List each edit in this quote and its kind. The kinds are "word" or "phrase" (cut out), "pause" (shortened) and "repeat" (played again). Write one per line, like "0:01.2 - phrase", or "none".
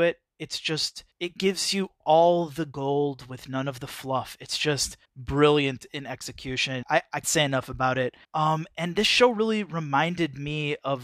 0:01.1 - pause
0:05.0 - pause
0:06.8 - word
0:07.2 - word
0:08.2 - pause